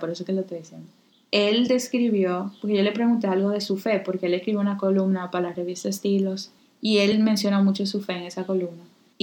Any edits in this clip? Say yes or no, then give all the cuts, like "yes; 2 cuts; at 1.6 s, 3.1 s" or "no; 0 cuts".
no; 0 cuts